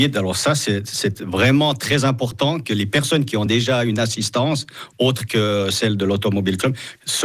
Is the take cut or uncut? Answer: uncut